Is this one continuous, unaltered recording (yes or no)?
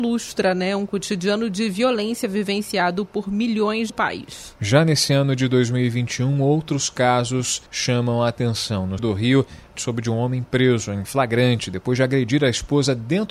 no